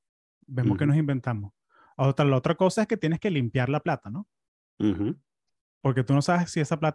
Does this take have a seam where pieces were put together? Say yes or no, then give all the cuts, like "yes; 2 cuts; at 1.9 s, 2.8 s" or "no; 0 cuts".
no; 0 cuts